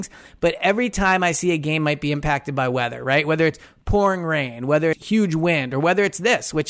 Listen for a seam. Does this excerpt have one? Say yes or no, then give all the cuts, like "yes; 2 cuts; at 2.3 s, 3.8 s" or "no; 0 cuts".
yes; 1 cut; at 4.9 s